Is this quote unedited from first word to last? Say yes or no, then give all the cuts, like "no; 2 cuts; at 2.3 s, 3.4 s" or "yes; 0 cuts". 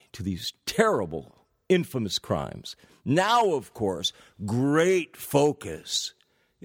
yes; 0 cuts